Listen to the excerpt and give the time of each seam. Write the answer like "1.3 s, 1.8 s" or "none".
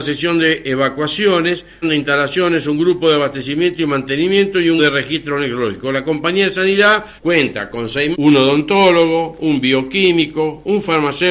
1.8 s, 4.8 s, 7.2 s, 8.1 s